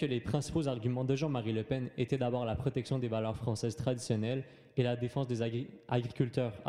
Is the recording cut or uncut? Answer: uncut